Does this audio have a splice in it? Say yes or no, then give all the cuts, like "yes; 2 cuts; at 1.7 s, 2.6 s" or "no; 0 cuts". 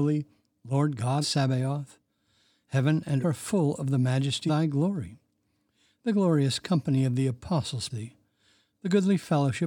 yes; 4 cuts; at 1.2 s, 3.2 s, 4.5 s, 7.9 s